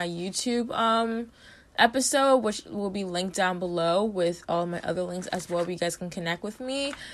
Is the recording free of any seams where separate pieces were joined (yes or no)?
yes